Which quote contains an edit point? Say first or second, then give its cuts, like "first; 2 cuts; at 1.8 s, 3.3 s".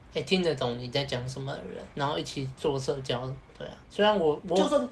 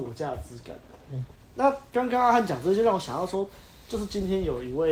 first; 3 cuts; at 1.9 s, 3.5 s, 3.8 s